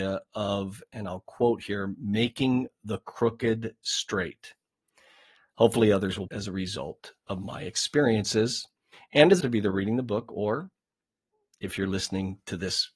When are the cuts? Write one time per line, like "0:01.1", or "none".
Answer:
0:06.3
0:08.9
0:09.4